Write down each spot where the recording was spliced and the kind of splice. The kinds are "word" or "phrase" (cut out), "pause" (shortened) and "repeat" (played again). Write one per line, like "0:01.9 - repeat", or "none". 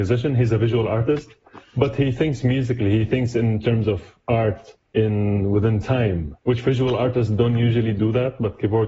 0:04.9 - pause
0:06.4 - pause